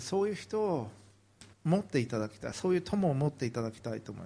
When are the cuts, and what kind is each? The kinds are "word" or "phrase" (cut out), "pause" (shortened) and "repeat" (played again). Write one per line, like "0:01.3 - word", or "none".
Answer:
0:01.5 - pause